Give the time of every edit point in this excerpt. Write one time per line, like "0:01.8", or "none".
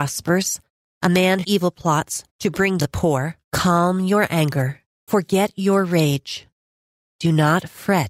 0:01.4
0:02.3
0:02.8
0:03.4
0:05.1